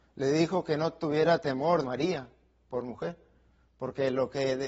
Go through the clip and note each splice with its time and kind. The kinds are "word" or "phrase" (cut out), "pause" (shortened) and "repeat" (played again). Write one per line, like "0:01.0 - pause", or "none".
0:01.8 - phrase